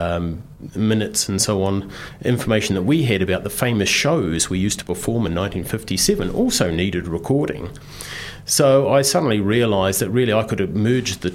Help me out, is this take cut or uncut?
uncut